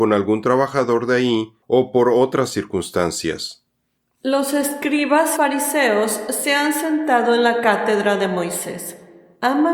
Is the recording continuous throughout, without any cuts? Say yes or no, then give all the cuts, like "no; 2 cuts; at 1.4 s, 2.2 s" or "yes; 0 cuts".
no; 1 cut; at 5.4 s